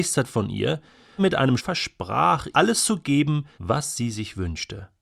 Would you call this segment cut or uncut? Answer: cut